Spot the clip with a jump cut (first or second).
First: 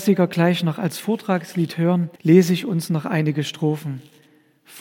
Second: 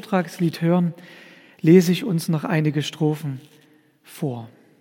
first